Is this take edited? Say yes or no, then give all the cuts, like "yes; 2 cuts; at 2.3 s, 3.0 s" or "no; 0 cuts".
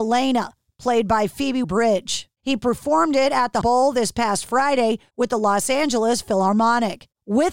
yes; 2 cuts; at 1.6 s, 3.6 s